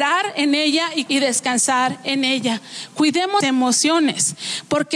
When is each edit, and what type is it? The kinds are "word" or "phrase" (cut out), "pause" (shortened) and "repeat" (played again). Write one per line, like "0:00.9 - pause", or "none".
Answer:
0:01.1 - word
0:03.4 - word